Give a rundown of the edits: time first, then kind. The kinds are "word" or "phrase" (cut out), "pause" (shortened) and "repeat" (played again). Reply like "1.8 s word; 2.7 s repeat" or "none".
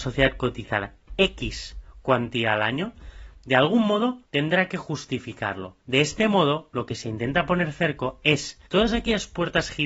4.2 s pause; 5.8 s pause; 8.7 s pause